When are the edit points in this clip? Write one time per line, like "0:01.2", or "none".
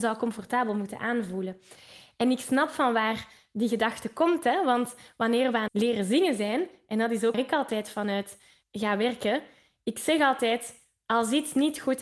0:05.7
0:07.3
0:08.6